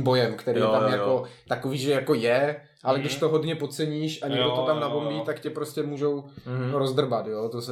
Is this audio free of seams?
yes; 0 cuts

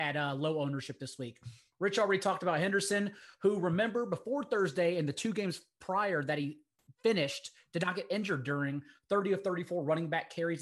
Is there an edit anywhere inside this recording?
no; 0 cuts

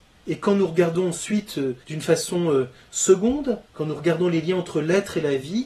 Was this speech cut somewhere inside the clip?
yes; 2 cuts; at 1.8 s, 3.6 s

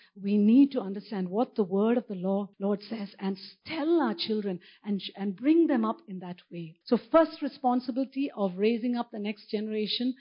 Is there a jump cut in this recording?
yes; 2 cuts; at 2.5 s, 6.8 s

